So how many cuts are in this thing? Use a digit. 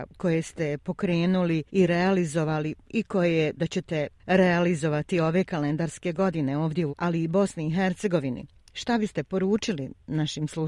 3